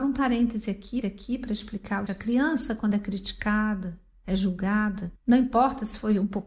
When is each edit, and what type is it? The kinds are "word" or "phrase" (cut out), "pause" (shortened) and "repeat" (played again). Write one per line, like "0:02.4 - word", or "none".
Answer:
0:01.0 - repeat
0:02.1 - word
0:05.2 - pause